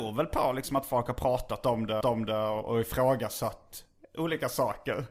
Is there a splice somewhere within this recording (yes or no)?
yes